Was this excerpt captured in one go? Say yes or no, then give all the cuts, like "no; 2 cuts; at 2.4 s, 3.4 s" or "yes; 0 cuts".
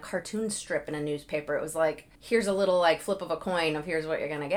no; 1 cut; at 2.2 s